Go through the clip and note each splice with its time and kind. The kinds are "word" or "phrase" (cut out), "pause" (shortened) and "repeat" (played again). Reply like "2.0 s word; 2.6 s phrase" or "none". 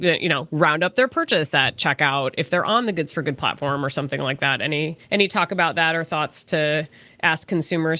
5.0 s pause